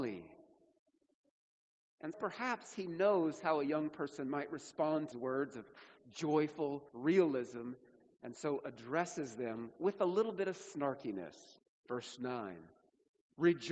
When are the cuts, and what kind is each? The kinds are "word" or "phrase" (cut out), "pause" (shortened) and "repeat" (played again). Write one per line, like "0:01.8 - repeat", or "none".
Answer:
0:02.1 - word
0:05.1 - word
0:06.9 - pause
0:11.6 - pause